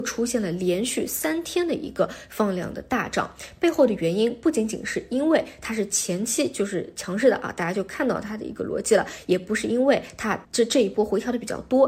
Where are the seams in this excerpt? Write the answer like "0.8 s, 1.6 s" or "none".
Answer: 10.4 s